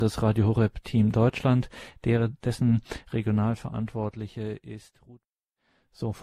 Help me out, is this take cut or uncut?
uncut